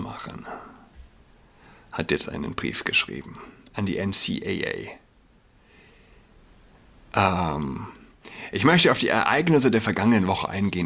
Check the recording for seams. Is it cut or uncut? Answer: uncut